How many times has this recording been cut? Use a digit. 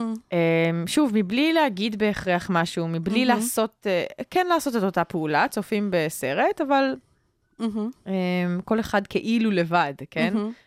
0